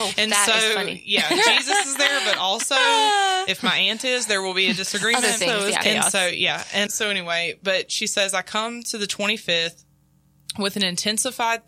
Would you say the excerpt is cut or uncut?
cut